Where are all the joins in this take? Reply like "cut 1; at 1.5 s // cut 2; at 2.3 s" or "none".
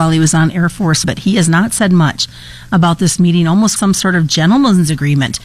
cut 1; at 1.0 s // cut 2; at 3.8 s